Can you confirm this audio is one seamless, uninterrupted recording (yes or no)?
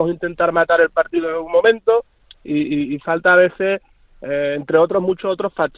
yes